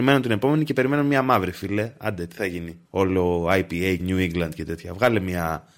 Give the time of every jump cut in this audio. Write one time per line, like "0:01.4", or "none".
0:02.9
0:04.0

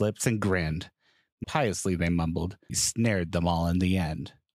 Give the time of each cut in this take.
0:01.4
0:02.7

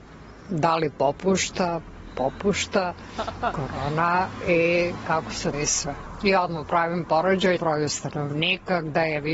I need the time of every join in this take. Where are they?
0:02.1
0:05.5
0:07.6

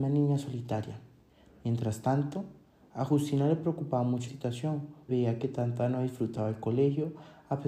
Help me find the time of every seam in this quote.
0:04.3
0:05.1

